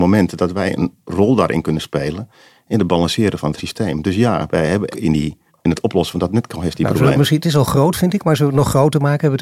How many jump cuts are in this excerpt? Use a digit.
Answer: 3